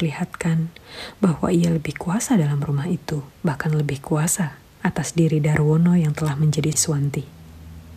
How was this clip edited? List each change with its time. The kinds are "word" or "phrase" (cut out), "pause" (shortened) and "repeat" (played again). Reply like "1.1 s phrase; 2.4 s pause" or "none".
3.3 s pause; 6.7 s word